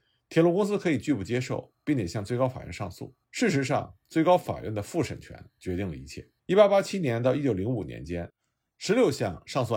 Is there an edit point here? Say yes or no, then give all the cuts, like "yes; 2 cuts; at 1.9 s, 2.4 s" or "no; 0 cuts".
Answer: yes; 2 cuts; at 3.2 s, 6.4 s